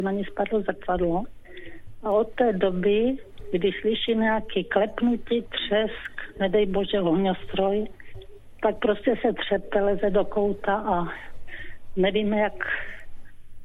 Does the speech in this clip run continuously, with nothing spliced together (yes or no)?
yes